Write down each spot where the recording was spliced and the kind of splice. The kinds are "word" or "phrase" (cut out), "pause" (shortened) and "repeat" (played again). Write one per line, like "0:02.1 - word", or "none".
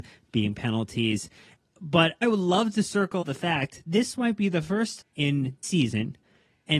0:02.2 - word
0:03.2 - word
0:03.9 - word
0:05.0 - word
0:05.6 - word